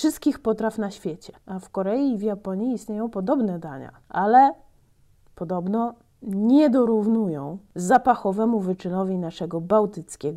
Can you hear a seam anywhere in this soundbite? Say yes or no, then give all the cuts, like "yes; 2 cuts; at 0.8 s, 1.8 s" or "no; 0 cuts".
yes; 1 cut; at 1.4 s